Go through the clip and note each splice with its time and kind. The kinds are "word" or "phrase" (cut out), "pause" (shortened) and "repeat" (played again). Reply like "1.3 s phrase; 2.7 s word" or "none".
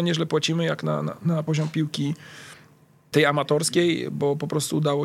none